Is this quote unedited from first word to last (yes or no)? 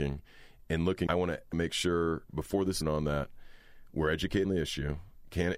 no